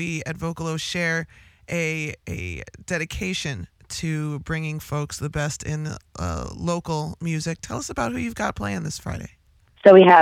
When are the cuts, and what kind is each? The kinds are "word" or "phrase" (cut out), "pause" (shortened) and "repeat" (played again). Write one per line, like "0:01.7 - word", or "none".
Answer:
none

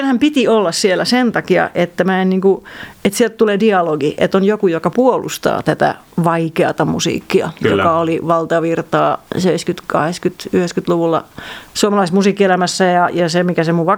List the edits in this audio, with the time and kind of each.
0:09.3 - pause

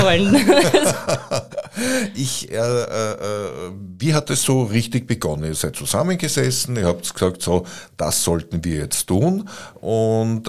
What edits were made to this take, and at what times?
none

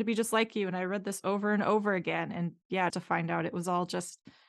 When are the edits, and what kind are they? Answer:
0:02.9 - word

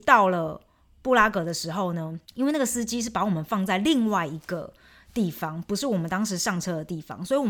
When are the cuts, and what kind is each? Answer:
0:02.2 - pause

